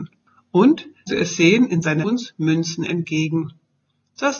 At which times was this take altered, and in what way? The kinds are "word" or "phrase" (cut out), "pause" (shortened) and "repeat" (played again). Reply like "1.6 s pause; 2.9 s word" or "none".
1.1 s word; 2.0 s phrase